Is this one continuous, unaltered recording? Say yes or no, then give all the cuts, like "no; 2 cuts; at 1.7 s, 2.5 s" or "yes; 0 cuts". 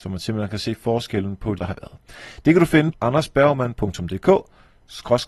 no; 2 cuts; at 1.6 s, 2.9 s